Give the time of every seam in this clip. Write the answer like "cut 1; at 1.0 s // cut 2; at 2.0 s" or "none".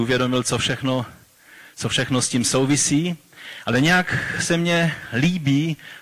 none